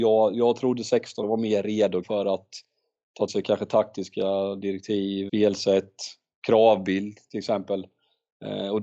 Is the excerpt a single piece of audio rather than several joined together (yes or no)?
no